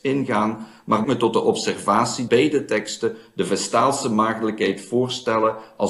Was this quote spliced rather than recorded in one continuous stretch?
yes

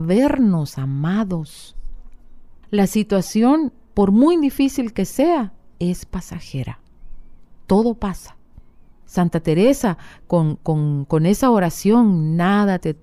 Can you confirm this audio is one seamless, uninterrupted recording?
no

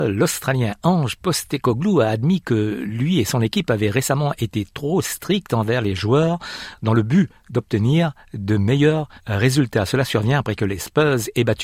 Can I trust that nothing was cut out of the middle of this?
no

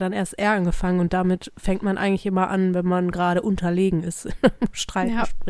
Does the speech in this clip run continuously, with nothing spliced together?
yes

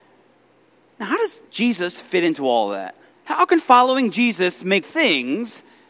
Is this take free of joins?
no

